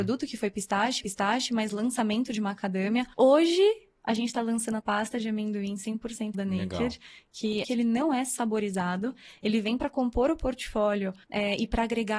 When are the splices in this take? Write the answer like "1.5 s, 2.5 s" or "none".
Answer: 1.0 s, 3.1 s, 4.8 s, 6.3 s, 7.6 s, 11.2 s